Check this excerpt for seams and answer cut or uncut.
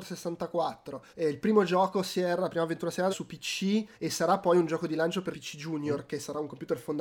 cut